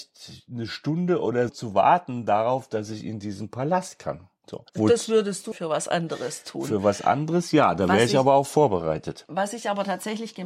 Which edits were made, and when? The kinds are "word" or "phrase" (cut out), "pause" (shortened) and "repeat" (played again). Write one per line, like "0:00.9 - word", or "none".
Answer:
0:01.5 - word
0:04.7 - pause
0:05.5 - phrase

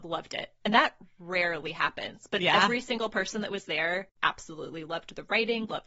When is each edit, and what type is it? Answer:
none

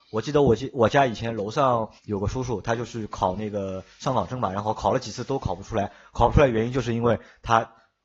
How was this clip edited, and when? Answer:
0:02.0 - pause

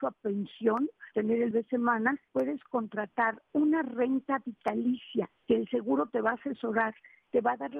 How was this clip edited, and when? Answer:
0:01.1 - word
0:01.5 - word
0:02.3 - word
0:03.5 - word
0:05.4 - pause

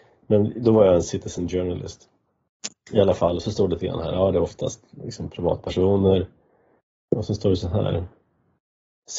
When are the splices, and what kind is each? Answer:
none

